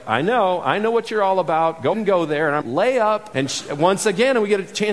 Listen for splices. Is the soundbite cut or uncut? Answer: cut